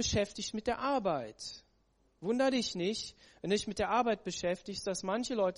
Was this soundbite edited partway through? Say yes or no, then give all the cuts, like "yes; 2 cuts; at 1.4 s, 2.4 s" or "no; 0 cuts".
no; 0 cuts